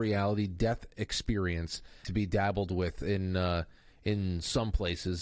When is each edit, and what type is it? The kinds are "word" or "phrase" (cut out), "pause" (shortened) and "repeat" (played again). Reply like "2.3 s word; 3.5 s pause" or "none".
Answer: 2.0 s phrase